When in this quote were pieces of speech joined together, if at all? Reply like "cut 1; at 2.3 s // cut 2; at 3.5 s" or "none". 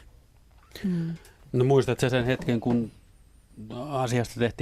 none